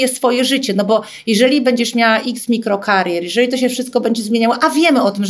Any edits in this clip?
no; 0 cuts

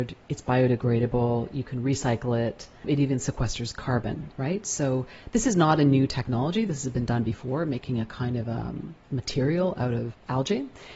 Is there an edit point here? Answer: no; 0 cuts

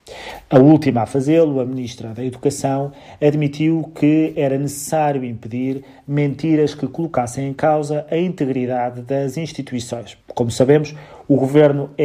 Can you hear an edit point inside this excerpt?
yes; 1 cut; at 10.2 s

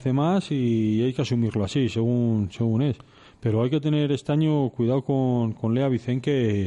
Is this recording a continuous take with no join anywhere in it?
yes; 0 cuts

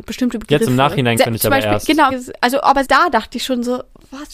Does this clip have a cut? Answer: yes; 3 cuts; at 1.2 s, 2.1 s, 2.8 s

